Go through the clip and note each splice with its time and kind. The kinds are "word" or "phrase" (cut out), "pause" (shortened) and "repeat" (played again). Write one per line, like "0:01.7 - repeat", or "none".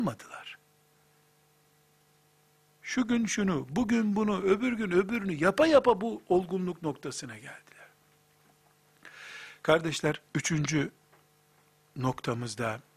0:10.3 - pause